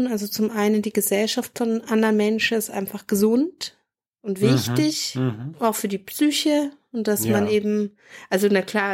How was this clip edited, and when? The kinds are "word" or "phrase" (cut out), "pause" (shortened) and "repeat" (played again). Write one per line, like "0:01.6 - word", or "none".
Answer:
none